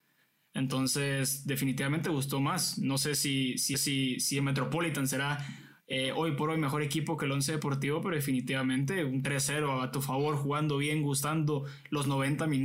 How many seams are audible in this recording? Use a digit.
1